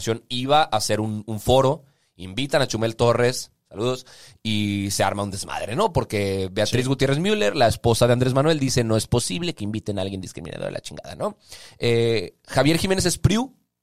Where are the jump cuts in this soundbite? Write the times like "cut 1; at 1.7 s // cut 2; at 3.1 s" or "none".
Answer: none

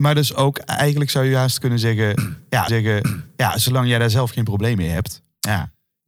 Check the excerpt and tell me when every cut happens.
cut 1; at 2.7 s

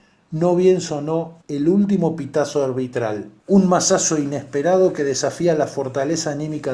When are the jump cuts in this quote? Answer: cut 1; at 1.4 s // cut 2; at 3.4 s

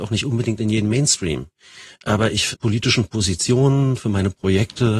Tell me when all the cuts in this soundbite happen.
cut 1; at 2.5 s

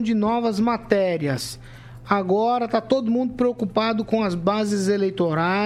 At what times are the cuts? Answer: none

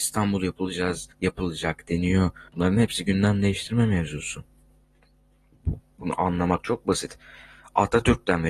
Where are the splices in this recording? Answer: cut 1; at 1.1 s // cut 2; at 2.5 s

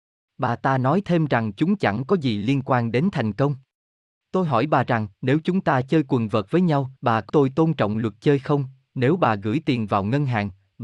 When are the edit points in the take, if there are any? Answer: cut 1; at 5.1 s // cut 2; at 7.0 s // cut 3; at 7.3 s

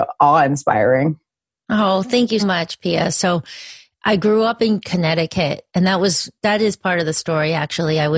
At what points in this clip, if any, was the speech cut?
cut 1; at 2.4 s

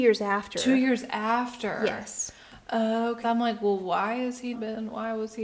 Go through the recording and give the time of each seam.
cut 1; at 3.2 s // cut 2; at 4.5 s

